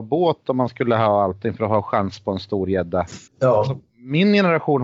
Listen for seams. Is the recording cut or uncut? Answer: cut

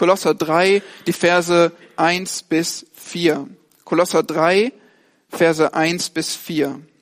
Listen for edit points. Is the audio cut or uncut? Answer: uncut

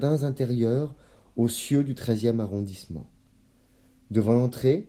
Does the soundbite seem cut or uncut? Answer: uncut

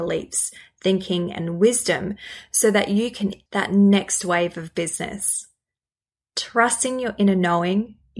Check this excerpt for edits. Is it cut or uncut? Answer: cut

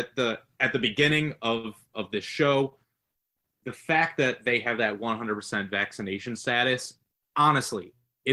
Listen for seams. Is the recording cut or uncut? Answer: uncut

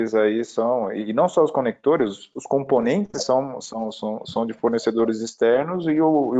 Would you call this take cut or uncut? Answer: uncut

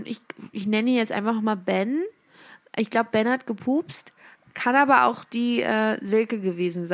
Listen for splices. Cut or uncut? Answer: uncut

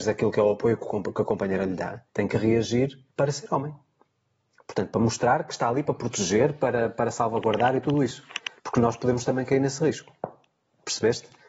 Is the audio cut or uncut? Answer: cut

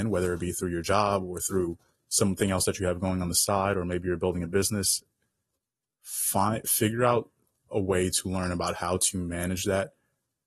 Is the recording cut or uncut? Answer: uncut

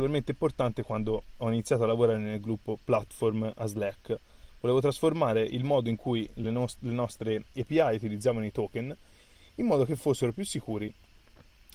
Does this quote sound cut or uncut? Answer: uncut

